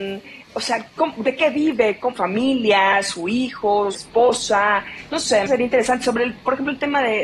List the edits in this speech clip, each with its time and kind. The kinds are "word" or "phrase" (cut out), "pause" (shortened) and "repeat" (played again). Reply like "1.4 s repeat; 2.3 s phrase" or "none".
2.2 s phrase; 3.9 s word; 5.5 s phrase